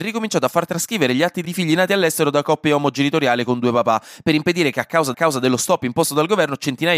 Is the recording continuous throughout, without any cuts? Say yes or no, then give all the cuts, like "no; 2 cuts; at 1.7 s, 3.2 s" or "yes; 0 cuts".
no; 2 cuts; at 1.4 s, 5.1 s